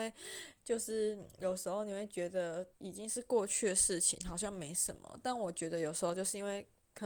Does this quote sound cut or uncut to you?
cut